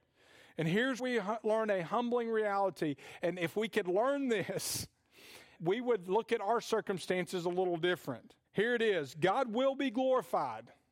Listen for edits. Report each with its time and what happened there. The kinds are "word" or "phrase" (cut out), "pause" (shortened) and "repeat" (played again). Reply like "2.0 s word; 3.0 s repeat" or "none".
1.0 s word; 5.6 s word; 8.4 s pause